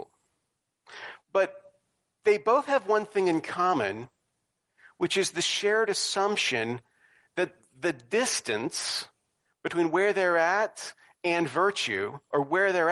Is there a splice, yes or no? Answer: no